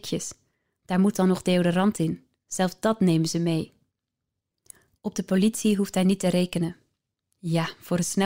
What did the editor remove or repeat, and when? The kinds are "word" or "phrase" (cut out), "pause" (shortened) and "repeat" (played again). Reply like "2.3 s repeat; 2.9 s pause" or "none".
none